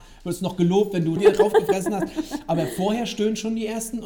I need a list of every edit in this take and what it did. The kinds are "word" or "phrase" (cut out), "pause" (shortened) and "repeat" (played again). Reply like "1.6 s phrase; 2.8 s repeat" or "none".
1.2 s phrase